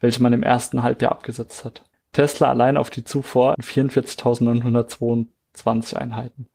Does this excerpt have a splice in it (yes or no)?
yes